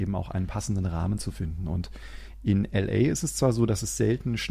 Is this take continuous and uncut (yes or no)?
yes